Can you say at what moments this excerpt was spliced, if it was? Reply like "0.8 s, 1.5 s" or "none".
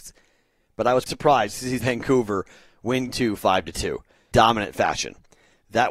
1.1 s, 1.8 s, 3.1 s, 4.3 s